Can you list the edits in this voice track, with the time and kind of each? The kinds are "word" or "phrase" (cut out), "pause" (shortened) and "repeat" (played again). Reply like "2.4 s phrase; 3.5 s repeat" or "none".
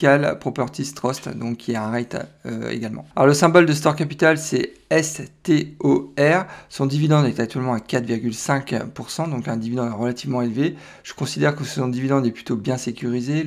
3.1 s pause